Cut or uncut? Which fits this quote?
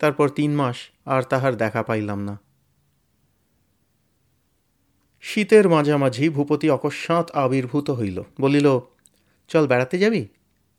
cut